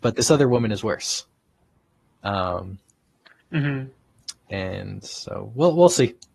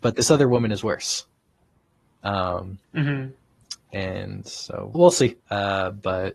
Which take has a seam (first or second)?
second